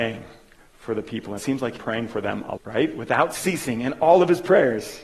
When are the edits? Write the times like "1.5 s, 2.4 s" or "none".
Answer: 1.4 s, 1.8 s, 2.6 s

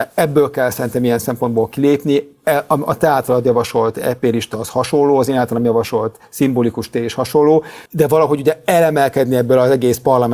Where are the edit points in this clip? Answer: 7.9 s

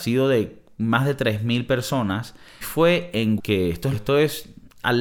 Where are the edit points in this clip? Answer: 2.6 s, 3.4 s, 3.9 s

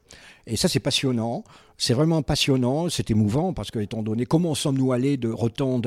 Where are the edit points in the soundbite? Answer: none

